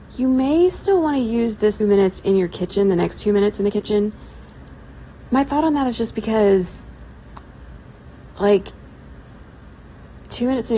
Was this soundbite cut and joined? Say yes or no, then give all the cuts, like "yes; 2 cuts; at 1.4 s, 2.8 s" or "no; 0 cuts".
yes; 1 cut; at 1.8 s